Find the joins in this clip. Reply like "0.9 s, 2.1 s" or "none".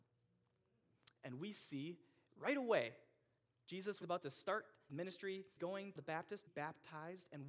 4.0 s, 4.9 s, 5.6 s, 6.0 s, 6.5 s